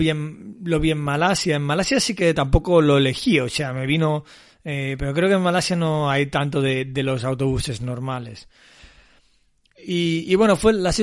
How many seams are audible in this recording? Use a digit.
0